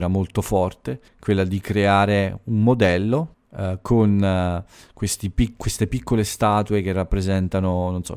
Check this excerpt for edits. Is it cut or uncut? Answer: cut